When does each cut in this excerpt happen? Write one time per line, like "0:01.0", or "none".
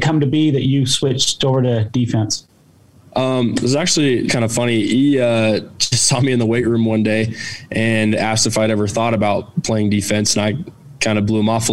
0:04.3